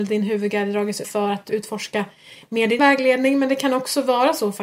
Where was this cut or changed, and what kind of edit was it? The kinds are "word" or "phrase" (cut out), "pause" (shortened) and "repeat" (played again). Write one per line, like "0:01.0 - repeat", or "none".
0:01.0 - word
0:01.5 - word
0:02.8 - word